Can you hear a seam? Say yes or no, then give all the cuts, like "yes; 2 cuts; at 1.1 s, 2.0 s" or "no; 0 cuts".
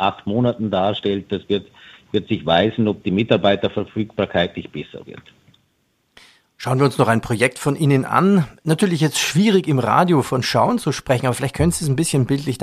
no; 0 cuts